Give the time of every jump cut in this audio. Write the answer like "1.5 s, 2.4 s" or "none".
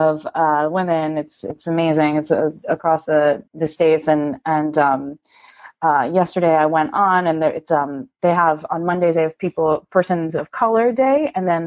3.5 s